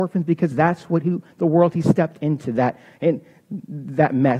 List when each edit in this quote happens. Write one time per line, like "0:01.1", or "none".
none